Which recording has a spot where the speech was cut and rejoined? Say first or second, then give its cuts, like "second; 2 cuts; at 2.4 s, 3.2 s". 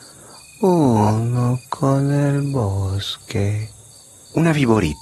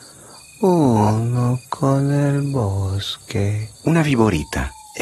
second; 1 cut; at 3.7 s